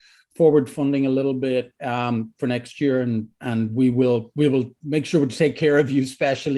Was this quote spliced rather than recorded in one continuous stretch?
no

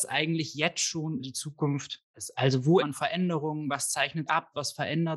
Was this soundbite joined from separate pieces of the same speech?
yes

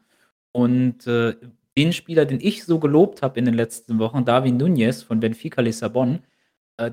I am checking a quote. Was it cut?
no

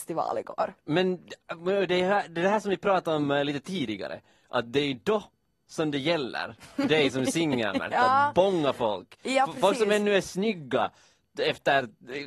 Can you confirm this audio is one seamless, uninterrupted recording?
yes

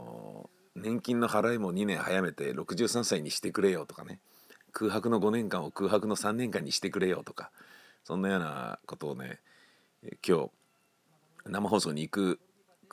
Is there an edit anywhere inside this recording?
no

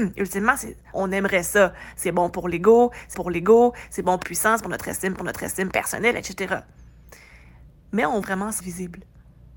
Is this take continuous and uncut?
no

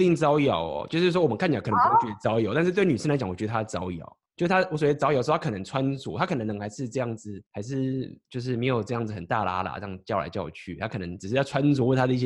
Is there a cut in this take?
yes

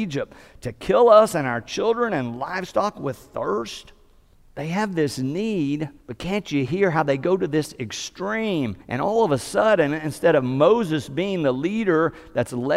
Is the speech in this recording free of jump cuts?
no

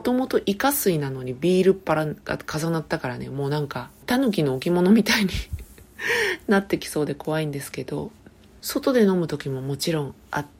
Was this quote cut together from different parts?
no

